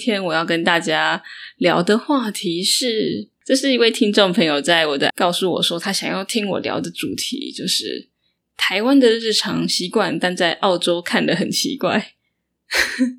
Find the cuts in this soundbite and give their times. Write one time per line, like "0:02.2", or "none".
0:05.1